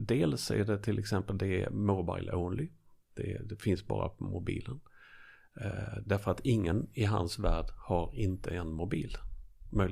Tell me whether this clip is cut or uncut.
uncut